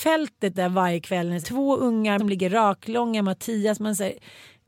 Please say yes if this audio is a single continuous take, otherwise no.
no